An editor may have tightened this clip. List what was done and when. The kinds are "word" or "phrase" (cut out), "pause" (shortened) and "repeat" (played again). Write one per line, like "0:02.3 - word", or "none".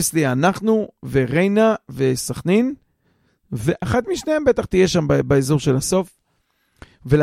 none